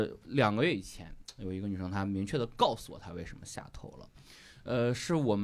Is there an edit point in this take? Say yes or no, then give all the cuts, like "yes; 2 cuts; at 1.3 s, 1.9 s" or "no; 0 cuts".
no; 0 cuts